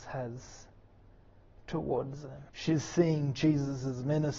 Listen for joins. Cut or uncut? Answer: cut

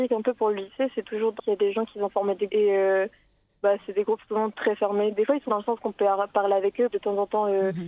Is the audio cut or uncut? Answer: cut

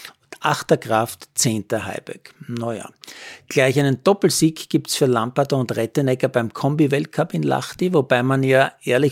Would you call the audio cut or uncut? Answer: uncut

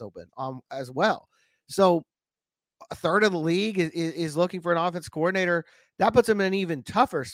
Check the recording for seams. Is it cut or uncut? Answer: uncut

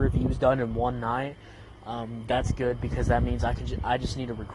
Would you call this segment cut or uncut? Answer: uncut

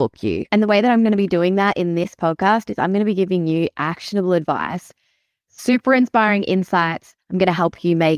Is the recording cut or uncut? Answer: uncut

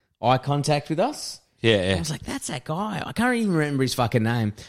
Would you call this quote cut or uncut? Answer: uncut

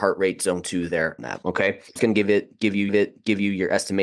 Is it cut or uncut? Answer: cut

